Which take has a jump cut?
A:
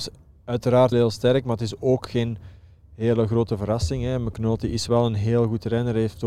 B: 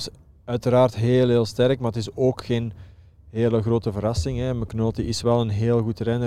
A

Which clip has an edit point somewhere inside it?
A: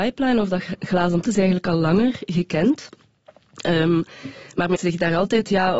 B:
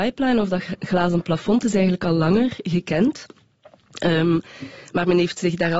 A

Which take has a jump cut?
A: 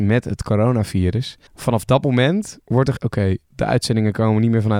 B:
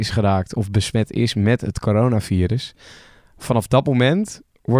A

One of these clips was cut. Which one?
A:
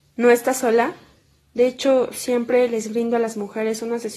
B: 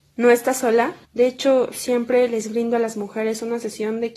B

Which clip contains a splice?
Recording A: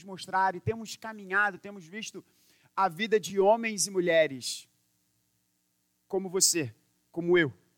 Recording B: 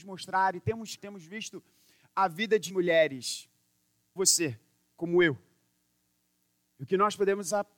B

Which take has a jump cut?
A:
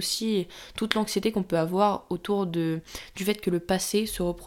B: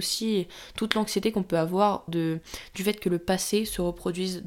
B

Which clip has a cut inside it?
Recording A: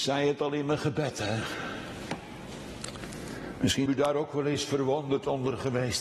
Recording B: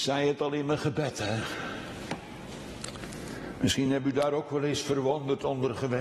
A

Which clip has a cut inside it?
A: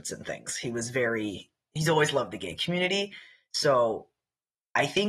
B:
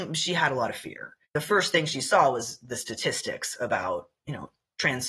B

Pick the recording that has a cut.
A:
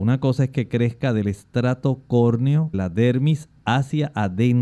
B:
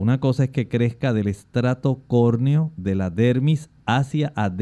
A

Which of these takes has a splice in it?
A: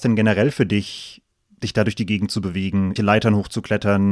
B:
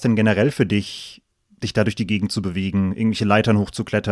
A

